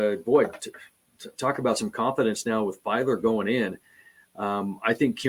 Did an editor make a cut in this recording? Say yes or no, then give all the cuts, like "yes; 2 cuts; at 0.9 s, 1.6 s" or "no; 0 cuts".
no; 0 cuts